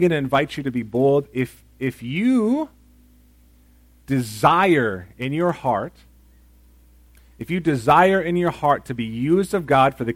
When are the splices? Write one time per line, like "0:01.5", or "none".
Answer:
none